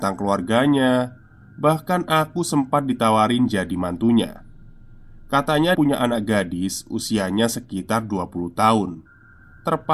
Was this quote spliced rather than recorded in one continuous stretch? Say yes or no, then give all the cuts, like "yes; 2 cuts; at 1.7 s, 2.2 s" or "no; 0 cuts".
yes; 1 cut; at 5.7 s